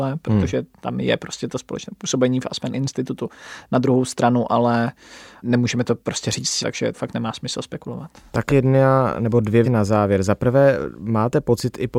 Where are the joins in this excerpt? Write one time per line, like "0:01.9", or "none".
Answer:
0:06.6
0:06.9
0:08.5
0:09.6